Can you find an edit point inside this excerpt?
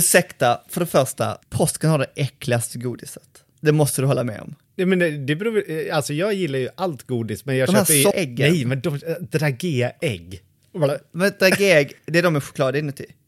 yes; 3 cuts; at 1.4 s, 8.1 s, 12.0 s

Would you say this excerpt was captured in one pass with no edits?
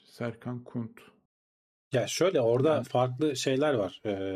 yes; 0 cuts

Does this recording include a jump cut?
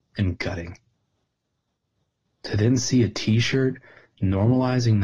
no; 0 cuts

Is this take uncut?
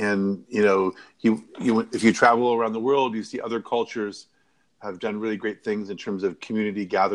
yes; 0 cuts

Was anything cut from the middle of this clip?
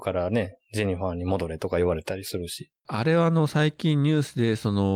yes; 1 cut; at 2.8 s

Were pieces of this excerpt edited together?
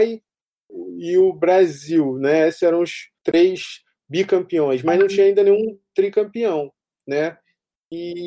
yes; 2 cuts; at 2.6 s, 3.2 s

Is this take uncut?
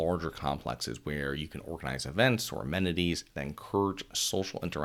yes; 0 cuts

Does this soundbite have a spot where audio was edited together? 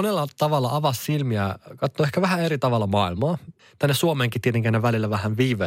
no; 0 cuts

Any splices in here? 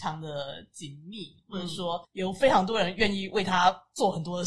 yes; 1 cut; at 2.0 s

